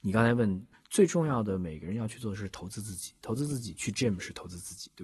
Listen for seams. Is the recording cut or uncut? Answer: uncut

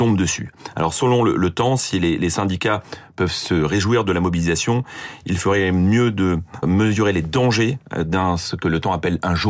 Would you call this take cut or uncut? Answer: cut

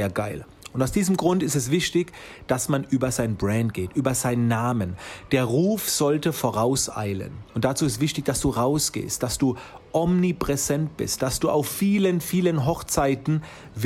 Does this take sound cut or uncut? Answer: cut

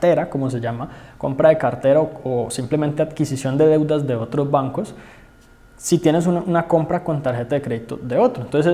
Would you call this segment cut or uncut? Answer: uncut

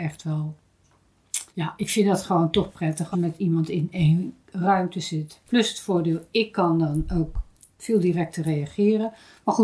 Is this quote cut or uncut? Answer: cut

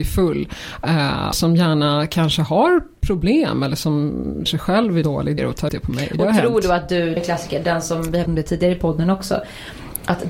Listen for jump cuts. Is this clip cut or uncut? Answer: cut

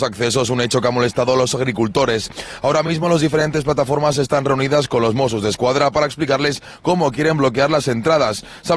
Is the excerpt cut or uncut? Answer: uncut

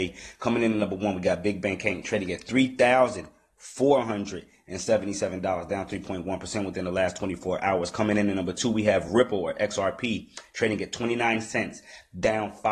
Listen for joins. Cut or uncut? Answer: uncut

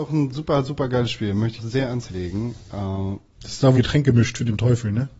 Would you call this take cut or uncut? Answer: cut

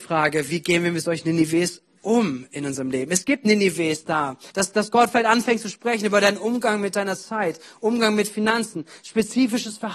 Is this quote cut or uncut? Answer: cut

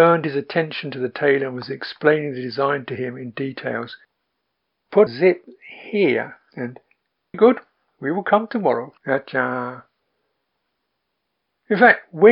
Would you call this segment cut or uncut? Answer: cut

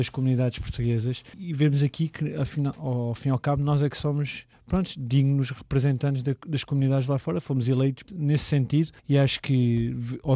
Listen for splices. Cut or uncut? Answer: uncut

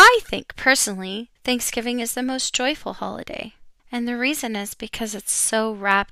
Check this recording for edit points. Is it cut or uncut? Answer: cut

